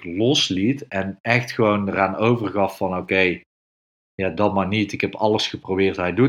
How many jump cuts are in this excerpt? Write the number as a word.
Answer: zero